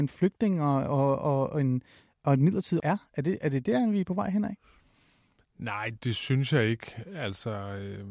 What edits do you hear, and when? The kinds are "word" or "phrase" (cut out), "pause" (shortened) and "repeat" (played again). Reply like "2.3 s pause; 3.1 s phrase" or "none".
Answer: 2.8 s word; 6.0 s word